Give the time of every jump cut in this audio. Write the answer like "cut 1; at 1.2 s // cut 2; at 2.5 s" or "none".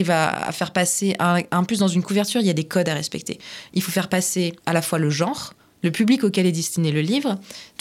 cut 1; at 4.6 s // cut 2; at 5.6 s